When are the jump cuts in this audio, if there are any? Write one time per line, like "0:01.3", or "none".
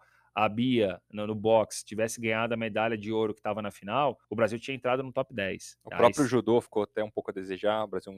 0:04.2